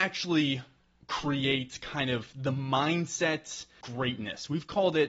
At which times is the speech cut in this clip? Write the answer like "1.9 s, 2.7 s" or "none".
3.8 s